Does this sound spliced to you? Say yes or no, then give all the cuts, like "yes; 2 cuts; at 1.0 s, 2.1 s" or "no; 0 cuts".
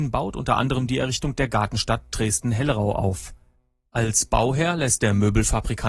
no; 0 cuts